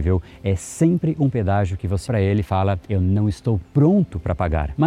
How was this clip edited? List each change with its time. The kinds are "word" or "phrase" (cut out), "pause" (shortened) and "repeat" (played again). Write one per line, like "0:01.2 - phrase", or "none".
0:02.1 - word
0:02.8 - pause